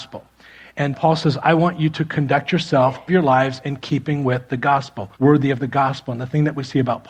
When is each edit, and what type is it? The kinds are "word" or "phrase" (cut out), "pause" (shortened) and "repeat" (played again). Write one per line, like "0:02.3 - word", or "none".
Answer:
0:00.9 - word
0:03.1 - word
0:05.2 - pause